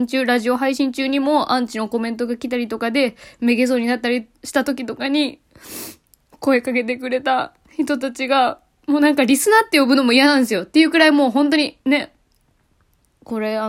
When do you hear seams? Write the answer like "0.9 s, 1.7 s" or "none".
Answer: 4.3 s, 11.8 s